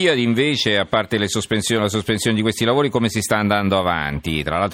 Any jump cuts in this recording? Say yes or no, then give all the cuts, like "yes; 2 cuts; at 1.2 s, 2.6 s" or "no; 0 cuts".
no; 0 cuts